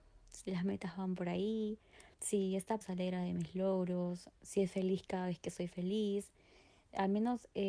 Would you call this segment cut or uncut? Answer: cut